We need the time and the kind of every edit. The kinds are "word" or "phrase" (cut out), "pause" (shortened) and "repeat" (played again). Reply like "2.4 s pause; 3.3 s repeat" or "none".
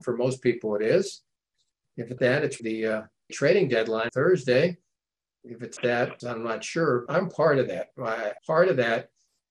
2.2 s word; 2.6 s word; 3.3 s word; 4.1 s word; 5.8 s word; 6.2 s word; 7.1 s word; 8.4 s word